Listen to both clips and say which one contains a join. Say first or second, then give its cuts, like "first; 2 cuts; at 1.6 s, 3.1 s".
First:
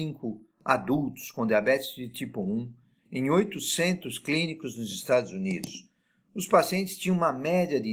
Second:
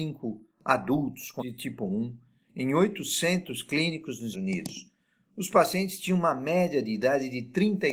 second; 2 cuts; at 1.4 s, 4.3 s